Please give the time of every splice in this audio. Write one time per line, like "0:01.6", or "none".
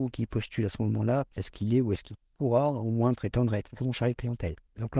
none